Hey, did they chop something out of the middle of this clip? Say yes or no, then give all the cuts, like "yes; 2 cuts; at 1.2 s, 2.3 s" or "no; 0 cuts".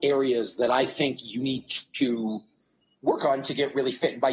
no; 0 cuts